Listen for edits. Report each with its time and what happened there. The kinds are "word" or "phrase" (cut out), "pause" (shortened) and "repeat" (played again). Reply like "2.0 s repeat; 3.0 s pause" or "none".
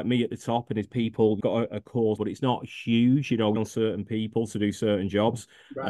1.4 s phrase; 2.2 s word; 3.6 s phrase